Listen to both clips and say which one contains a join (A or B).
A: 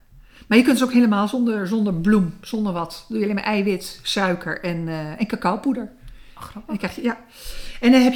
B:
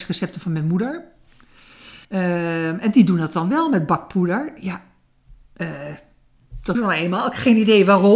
B